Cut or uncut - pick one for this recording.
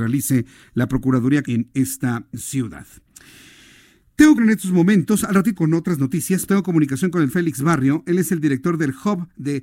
cut